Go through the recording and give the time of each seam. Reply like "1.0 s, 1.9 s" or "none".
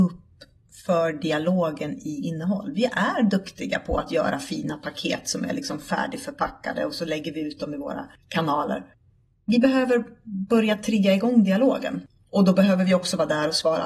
none

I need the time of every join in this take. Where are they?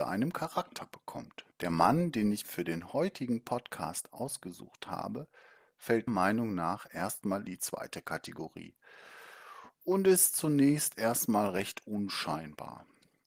1.5 s, 2.4 s, 6.1 s, 7.5 s

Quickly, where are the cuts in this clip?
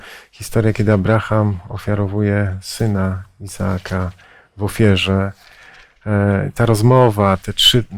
none

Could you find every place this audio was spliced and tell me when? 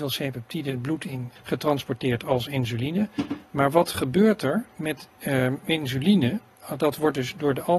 1.4 s

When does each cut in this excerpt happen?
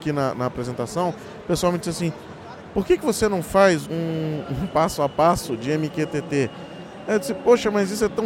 3.8 s

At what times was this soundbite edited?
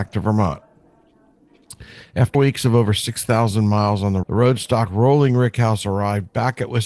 2.3 s, 4.2 s

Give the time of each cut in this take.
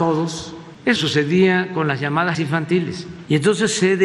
1.0 s, 2.3 s

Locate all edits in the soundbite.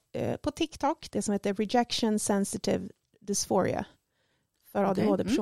none

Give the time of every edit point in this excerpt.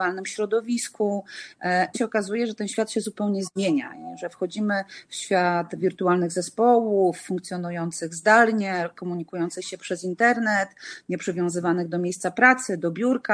1.9 s

